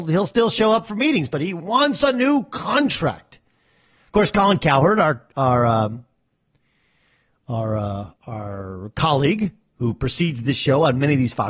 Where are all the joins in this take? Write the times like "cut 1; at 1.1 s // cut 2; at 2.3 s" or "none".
cut 1; at 8.2 s